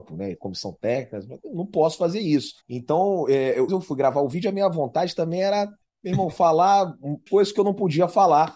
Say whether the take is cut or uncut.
cut